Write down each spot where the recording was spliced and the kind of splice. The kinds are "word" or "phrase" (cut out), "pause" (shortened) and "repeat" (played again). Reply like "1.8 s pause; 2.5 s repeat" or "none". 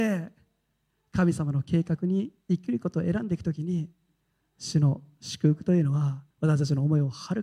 2.4 s pause; 6.3 s pause